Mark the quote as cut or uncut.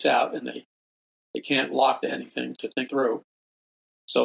cut